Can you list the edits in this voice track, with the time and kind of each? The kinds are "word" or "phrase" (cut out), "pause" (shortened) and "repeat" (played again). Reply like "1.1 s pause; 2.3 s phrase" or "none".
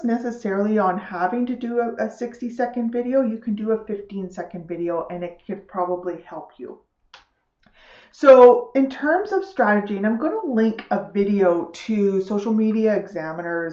none